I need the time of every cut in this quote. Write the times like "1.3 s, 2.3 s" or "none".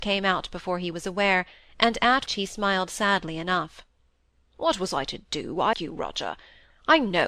2.3 s, 5.7 s